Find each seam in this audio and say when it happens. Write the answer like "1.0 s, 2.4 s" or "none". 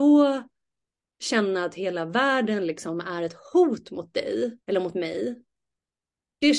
4.6 s